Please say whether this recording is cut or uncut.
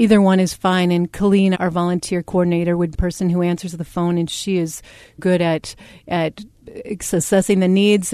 cut